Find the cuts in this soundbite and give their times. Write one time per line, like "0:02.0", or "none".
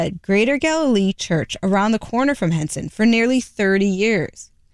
none